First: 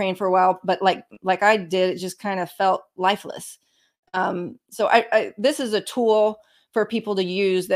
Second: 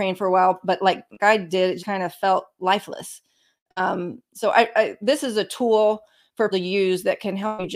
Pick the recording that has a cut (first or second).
second